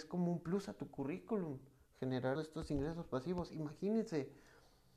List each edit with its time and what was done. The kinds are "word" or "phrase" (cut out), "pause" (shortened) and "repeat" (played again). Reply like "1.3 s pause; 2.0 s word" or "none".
2.3 s word